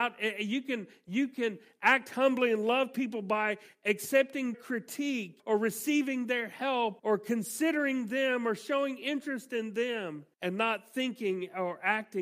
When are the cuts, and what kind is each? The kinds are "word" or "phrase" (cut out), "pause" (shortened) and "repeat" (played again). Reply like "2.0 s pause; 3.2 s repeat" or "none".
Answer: 4.5 s word; 5.4 s word; 7.0 s word; 10.3 s pause